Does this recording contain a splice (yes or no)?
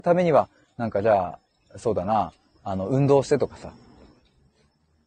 no